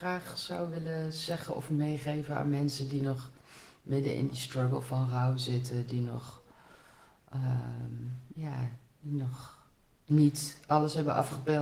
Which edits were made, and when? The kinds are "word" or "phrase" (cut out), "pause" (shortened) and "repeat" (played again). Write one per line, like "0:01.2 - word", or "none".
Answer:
0:08.3 - pause